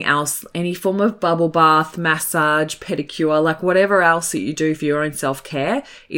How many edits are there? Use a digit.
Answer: 0